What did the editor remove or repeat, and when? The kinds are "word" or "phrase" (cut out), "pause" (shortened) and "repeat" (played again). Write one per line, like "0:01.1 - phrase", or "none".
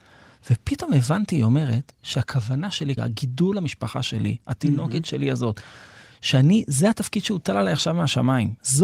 0:03.0 - word